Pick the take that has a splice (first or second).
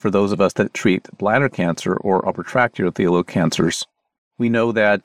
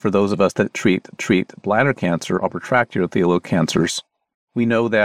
second